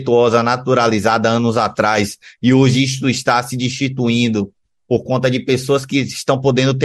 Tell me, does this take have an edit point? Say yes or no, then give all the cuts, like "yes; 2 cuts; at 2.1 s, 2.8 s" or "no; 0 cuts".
no; 0 cuts